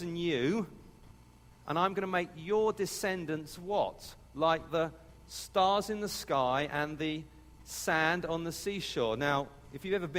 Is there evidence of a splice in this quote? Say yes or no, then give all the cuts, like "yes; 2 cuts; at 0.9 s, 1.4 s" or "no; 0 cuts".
no; 0 cuts